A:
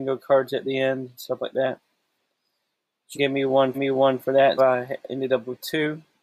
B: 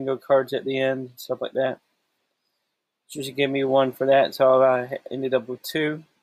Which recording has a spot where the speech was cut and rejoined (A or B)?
A